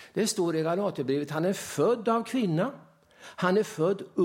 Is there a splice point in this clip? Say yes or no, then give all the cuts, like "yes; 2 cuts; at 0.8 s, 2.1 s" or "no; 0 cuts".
no; 0 cuts